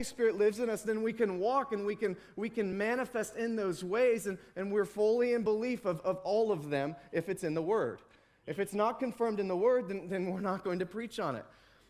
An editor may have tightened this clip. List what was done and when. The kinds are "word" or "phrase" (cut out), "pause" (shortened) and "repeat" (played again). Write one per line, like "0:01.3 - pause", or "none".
none